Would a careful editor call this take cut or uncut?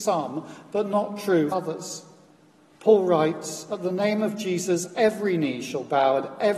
cut